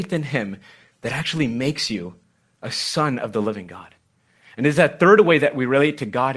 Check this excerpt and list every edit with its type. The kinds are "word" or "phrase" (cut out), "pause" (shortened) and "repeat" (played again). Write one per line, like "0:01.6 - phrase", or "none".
none